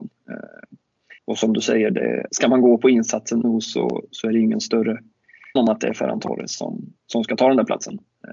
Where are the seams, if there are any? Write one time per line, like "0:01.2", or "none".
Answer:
0:01.2
0:02.3
0:03.4
0:05.6
0:07.0